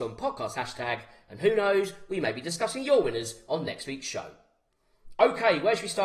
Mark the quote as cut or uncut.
uncut